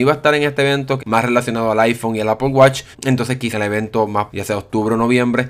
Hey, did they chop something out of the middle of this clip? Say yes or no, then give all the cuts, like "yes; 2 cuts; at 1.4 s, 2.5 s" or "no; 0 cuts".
yes; 4 cuts; at 1.0 s, 2.9 s, 3.5 s, 4.3 s